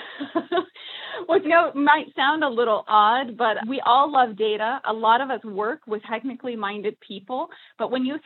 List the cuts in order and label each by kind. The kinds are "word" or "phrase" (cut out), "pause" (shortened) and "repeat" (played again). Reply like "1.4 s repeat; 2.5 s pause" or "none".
1.4 s word; 3.6 s word; 6.0 s word